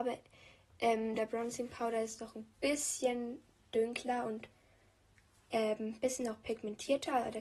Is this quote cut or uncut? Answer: uncut